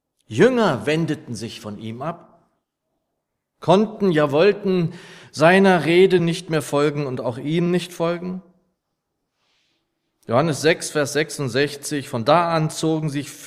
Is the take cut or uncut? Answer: uncut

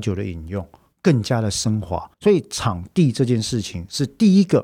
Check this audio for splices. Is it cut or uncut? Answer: cut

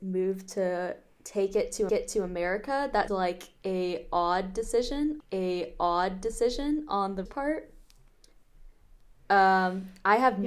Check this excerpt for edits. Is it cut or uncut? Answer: cut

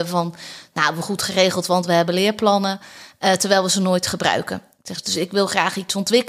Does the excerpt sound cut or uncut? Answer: uncut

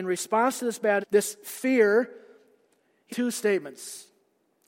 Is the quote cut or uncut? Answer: cut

